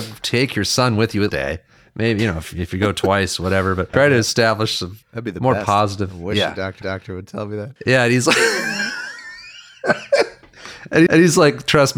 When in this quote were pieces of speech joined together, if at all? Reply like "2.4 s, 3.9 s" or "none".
1.3 s, 3.9 s, 5.0 s, 6.8 s, 7.8 s, 11.1 s